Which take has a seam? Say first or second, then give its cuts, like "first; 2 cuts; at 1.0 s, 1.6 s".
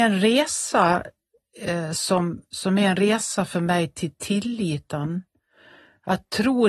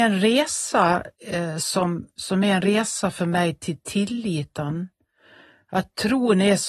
second; 1 cut; at 1.1 s